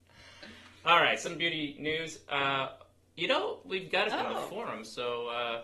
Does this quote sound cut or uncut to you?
cut